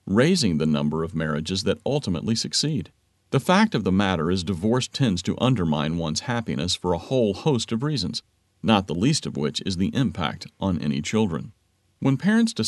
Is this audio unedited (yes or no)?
yes